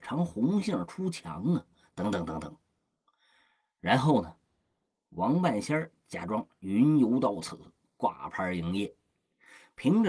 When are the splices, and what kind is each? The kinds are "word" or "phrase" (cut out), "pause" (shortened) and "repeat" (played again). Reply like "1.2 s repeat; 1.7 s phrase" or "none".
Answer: none